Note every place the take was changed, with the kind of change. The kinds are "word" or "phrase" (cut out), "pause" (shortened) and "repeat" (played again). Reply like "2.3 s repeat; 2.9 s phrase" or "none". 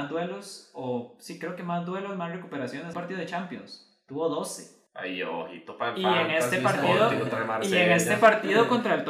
2.9 s phrase; 4.9 s pause